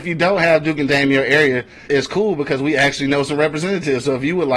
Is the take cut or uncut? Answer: cut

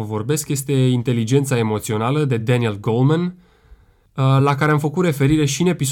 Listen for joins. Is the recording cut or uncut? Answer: uncut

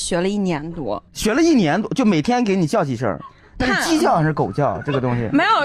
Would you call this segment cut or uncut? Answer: cut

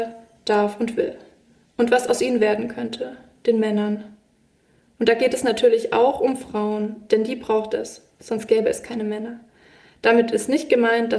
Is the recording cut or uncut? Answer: uncut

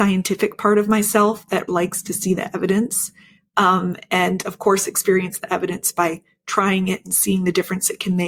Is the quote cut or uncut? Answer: cut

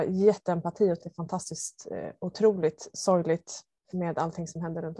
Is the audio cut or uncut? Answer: cut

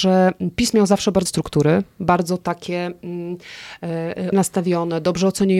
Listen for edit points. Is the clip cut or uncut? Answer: cut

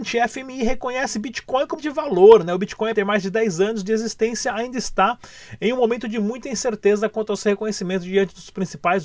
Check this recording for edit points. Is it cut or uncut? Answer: cut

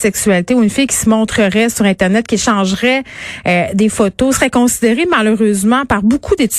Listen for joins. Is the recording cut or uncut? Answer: uncut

